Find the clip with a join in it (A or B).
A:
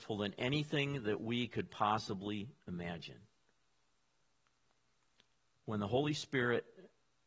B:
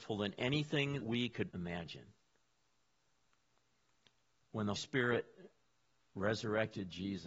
B